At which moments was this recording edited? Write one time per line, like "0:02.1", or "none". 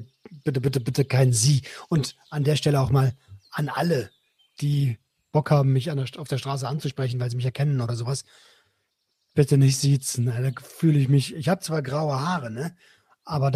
none